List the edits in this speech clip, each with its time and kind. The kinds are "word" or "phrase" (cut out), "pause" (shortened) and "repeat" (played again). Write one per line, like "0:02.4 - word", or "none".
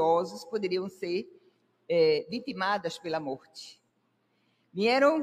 none